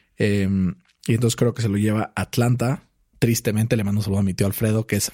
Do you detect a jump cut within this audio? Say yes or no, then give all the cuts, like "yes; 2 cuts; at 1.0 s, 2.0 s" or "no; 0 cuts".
no; 0 cuts